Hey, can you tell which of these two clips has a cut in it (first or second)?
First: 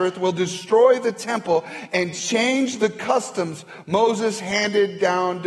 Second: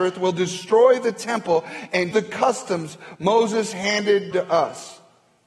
second